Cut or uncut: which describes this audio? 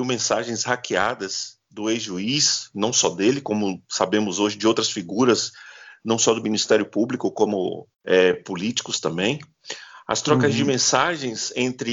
cut